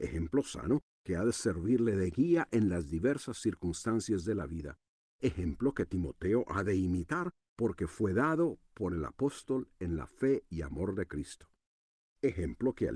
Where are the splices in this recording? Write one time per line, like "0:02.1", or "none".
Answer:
none